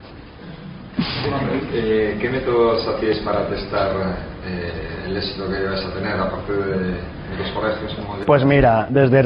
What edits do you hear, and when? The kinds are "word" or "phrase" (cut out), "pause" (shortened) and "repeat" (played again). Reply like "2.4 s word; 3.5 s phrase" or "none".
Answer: none